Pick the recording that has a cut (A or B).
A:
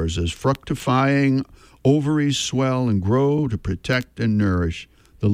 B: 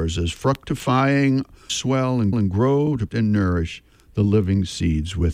B